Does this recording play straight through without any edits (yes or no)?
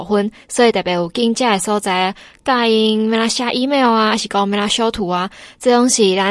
yes